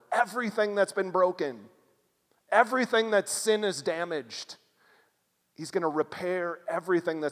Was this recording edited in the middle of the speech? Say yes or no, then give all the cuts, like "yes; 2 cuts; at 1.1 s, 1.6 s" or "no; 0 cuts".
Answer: no; 0 cuts